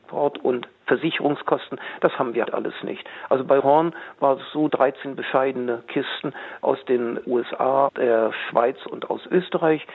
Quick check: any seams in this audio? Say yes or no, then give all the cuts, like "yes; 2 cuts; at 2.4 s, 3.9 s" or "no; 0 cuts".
yes; 4 cuts; at 2.4 s, 3.6 s, 4.7 s, 7.9 s